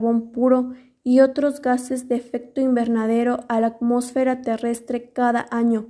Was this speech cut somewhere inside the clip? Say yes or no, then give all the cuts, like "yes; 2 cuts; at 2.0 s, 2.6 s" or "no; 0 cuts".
no; 0 cuts